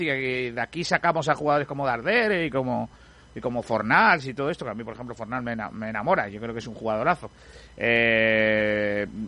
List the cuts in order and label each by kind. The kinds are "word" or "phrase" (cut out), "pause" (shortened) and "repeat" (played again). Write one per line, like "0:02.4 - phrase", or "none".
none